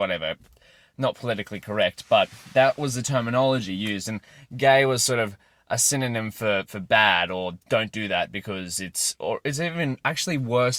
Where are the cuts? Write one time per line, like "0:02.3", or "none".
none